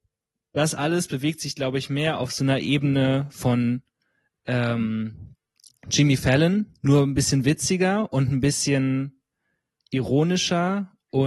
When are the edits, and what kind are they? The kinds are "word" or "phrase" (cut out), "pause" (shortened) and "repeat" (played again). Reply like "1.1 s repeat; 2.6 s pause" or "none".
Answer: none